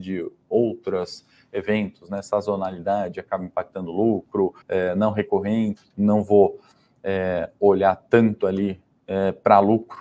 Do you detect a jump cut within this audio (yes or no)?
yes